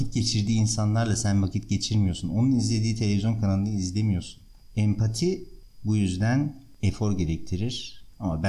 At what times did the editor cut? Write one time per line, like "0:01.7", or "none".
none